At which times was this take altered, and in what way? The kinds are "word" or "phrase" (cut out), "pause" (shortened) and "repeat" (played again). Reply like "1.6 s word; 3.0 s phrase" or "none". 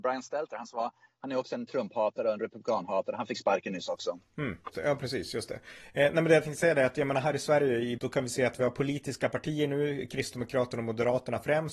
4.7 s word; 8.0 s word